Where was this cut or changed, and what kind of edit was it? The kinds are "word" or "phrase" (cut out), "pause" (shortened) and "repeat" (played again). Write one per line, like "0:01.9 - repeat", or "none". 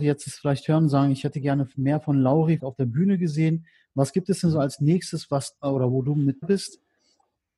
0:02.6 - word
0:05.6 - word
0:06.4 - word